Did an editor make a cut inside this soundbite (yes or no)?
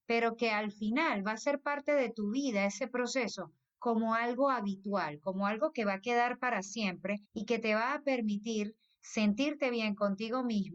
yes